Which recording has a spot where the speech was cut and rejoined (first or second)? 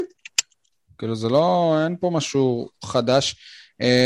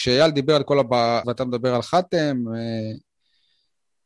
second